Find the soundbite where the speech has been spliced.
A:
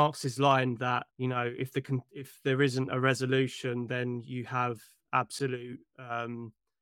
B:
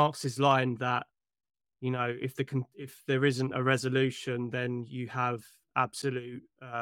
A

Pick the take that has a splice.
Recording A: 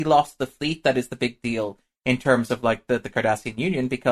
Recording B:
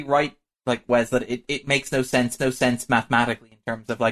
B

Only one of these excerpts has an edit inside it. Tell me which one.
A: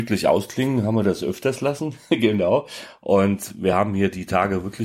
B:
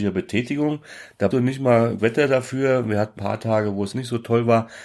B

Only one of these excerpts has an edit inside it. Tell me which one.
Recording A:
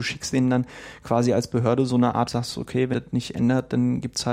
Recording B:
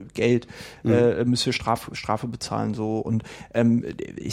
A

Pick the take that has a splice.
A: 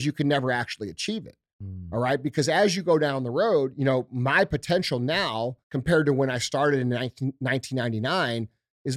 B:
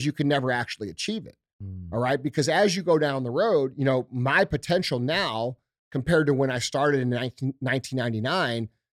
A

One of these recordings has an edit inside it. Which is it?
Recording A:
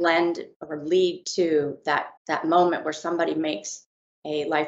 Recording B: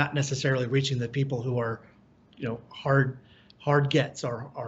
A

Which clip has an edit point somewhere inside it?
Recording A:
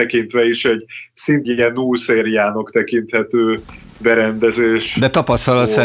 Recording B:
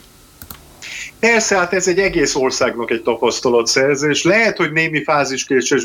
A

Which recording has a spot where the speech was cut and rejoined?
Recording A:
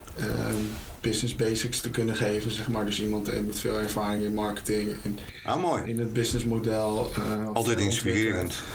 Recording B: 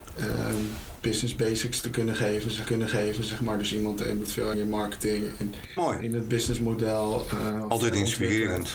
B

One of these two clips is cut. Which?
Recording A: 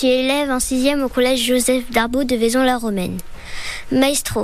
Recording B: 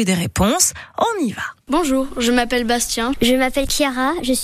B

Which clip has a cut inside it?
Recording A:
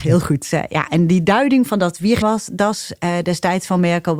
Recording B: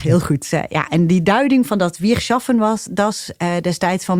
A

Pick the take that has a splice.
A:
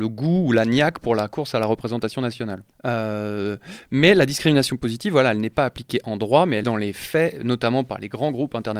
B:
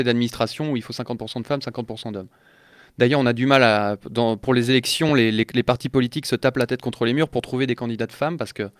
A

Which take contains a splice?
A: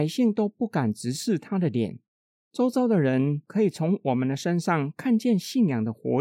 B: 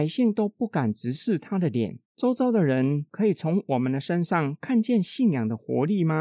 B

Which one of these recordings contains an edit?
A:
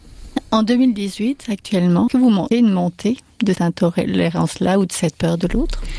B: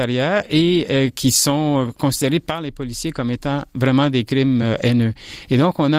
A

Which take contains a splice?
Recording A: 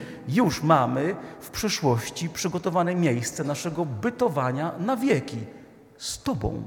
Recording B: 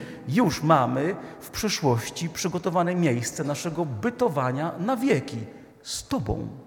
B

